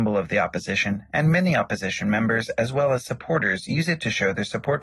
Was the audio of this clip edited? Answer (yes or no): no